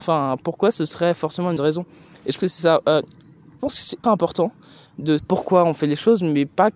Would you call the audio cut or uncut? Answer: cut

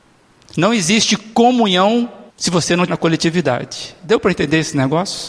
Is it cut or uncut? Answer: cut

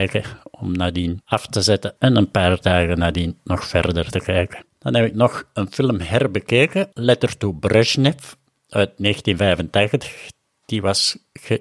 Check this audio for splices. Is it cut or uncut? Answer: cut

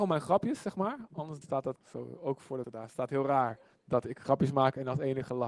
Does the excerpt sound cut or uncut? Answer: cut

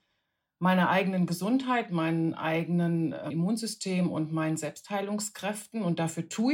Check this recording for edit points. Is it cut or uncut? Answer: cut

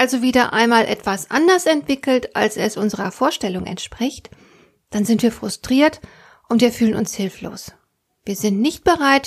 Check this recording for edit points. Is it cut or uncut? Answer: uncut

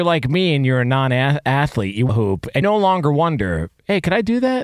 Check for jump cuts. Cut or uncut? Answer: cut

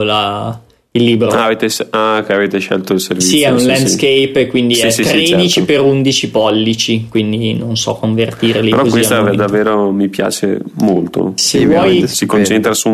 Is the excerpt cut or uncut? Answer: uncut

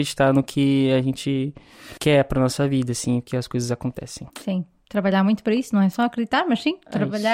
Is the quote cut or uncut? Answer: cut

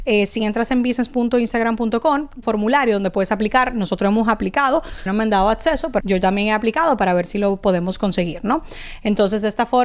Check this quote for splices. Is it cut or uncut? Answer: cut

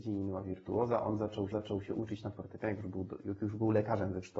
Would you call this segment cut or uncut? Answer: cut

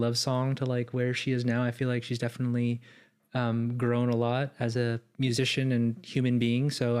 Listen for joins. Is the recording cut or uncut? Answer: uncut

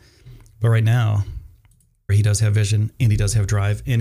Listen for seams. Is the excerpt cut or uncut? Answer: cut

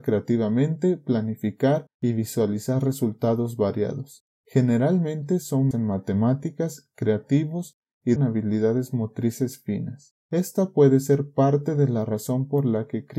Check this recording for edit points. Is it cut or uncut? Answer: cut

